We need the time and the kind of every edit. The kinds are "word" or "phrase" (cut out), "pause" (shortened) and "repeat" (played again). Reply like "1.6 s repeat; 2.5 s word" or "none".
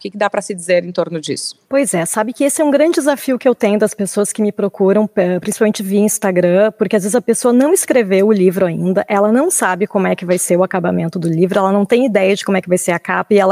1.6 s pause